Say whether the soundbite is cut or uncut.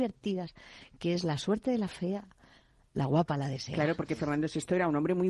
uncut